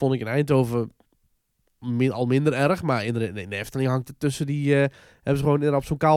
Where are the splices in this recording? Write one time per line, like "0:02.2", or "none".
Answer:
none